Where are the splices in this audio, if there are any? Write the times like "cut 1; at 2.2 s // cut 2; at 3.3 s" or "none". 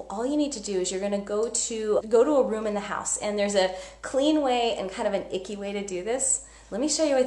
cut 1; at 2.0 s